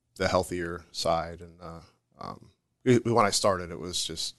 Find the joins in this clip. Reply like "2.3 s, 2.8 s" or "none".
none